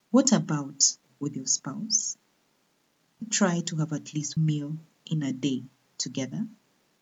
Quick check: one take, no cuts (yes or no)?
no